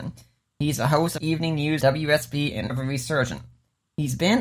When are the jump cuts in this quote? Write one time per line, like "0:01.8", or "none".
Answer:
0:01.2
0:01.8
0:02.7